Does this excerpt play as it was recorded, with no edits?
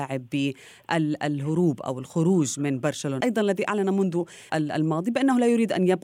no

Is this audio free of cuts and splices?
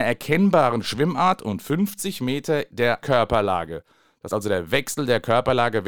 no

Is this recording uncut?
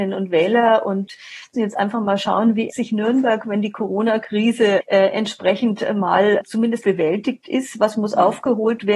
no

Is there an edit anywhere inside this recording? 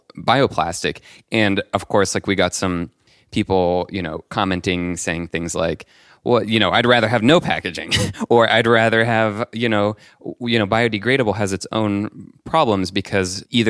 no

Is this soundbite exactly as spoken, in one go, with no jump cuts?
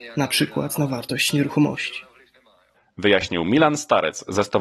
yes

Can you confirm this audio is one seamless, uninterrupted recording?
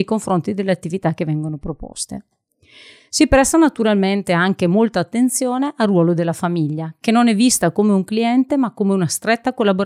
yes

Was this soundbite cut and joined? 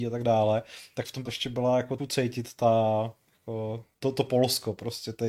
yes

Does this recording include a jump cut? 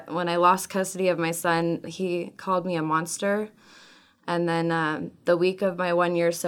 no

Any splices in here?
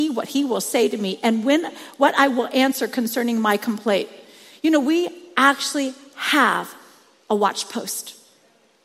no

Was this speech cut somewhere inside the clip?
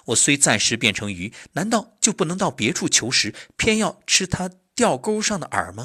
no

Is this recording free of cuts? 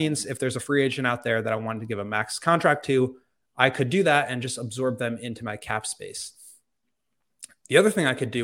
yes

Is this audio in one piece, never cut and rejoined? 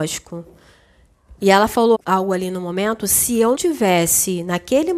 no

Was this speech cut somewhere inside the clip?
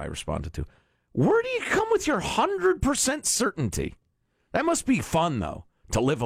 no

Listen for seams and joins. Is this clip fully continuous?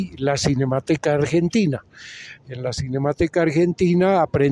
yes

